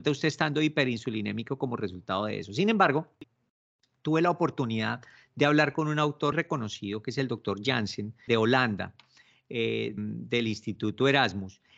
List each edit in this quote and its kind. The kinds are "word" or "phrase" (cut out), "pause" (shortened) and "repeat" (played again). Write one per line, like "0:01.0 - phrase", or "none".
0:06.3 - word
0:08.3 - word
0:10.0 - word